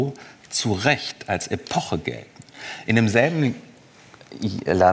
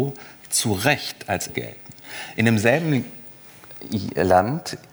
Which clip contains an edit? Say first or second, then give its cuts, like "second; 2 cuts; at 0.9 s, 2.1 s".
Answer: second; 1 cut; at 1.5 s